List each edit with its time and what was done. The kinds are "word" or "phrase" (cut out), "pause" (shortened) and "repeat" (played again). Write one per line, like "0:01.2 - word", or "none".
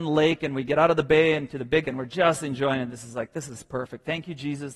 0:01.8 - word